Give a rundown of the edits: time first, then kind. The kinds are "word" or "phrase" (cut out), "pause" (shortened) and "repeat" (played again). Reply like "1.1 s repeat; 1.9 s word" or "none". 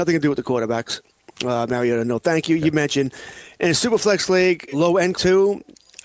4.7 s word; 5.1 s word